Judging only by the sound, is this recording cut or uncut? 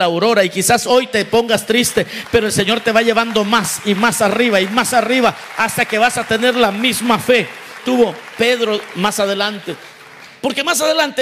cut